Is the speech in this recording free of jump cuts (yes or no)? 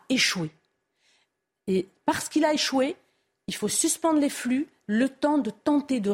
yes